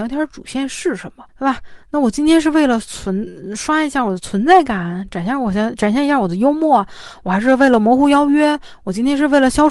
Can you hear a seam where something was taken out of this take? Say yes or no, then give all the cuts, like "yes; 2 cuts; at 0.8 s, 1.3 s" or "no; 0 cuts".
yes; 1 cut; at 1.3 s